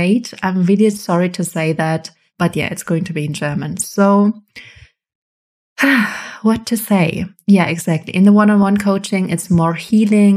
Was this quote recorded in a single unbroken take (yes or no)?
yes